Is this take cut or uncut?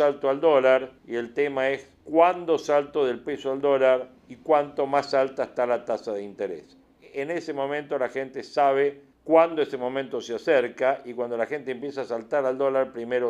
cut